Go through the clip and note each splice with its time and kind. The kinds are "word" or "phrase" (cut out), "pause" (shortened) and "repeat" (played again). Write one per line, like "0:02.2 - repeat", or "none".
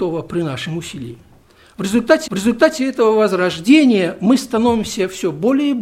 0:02.3 - repeat